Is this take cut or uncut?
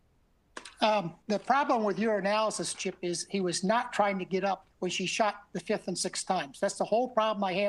cut